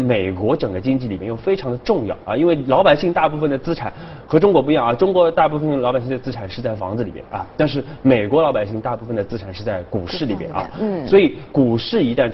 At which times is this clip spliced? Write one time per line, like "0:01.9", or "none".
none